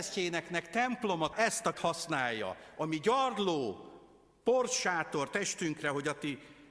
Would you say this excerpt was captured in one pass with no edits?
no; 2 cuts; at 1.3 s, 1.7 s

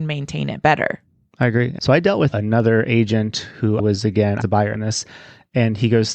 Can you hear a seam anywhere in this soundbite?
yes; 5 cuts; at 1.8 s, 2.3 s, 3.8 s, 4.4 s, 4.7 s

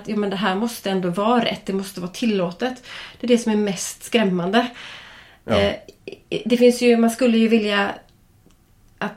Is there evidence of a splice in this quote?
no; 0 cuts

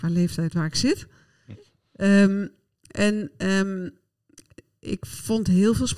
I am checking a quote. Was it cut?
no; 0 cuts

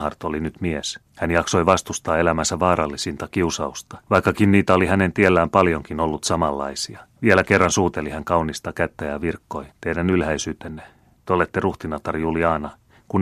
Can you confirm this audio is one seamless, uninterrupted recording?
no; 4 cuts; at 1.1 s, 4.0 s, 7.2 s, 9.7 s

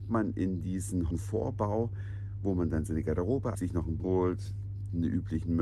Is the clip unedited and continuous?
no; 3 cuts; at 1.1 s, 3.5 s, 4.0 s

